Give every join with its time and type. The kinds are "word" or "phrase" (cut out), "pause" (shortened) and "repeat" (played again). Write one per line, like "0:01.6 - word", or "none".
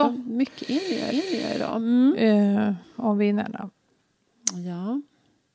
0:01.1 - repeat
0:02.8 - pause